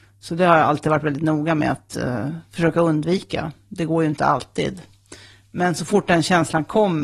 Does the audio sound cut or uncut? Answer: uncut